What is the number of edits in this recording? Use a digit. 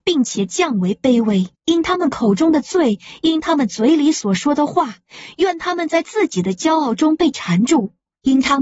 1